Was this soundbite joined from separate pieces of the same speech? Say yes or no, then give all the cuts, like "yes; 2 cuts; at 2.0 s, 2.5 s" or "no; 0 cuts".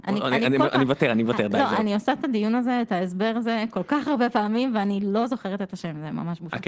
no; 0 cuts